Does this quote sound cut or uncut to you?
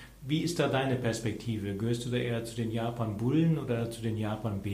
uncut